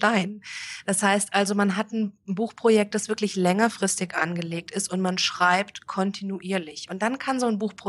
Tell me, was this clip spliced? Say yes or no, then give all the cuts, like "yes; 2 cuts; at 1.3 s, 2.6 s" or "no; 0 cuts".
no; 0 cuts